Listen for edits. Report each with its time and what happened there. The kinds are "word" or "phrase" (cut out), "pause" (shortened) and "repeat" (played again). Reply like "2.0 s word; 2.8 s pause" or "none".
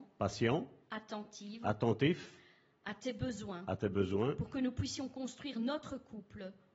none